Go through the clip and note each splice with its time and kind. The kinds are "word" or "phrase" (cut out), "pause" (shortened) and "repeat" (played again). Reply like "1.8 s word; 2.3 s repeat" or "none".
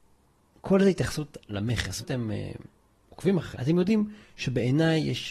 2.0 s word; 3.5 s word